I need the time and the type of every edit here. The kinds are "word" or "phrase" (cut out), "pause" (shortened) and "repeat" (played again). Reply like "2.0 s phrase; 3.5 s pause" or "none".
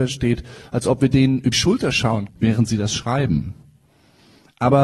1.5 s word; 2.3 s word